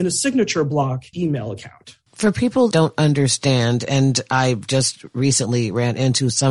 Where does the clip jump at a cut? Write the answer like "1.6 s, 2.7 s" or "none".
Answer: 1.1 s, 2.1 s, 2.7 s